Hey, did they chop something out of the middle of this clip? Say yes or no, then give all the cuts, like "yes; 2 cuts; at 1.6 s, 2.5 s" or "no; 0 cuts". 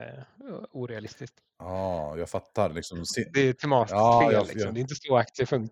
no; 0 cuts